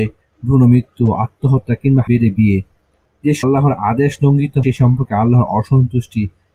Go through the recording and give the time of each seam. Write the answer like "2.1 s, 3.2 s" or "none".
2.1 s, 3.4 s, 4.6 s